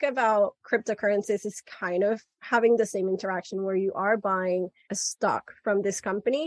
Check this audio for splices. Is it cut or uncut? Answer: uncut